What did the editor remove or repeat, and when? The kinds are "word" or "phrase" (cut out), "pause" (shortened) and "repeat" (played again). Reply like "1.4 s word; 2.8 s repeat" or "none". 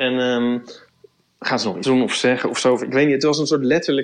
1.8 s word